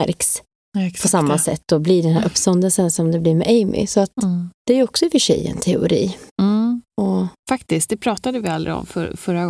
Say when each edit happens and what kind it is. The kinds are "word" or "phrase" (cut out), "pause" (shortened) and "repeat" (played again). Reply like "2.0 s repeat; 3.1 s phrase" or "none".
4.5 s pause; 6.3 s pause; 7.4 s pause